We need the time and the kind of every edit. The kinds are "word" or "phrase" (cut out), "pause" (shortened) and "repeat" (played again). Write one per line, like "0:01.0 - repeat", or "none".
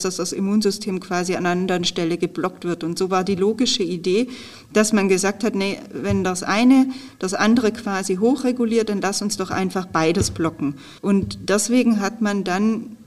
0:11.0 - pause